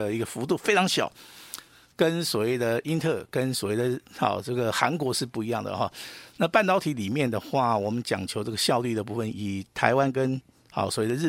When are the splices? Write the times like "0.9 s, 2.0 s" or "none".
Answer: none